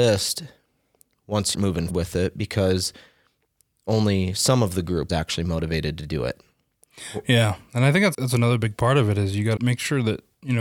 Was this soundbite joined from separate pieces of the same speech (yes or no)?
yes